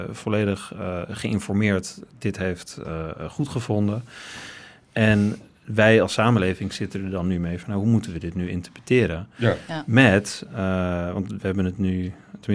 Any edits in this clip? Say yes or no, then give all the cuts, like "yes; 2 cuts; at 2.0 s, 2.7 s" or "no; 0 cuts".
no; 0 cuts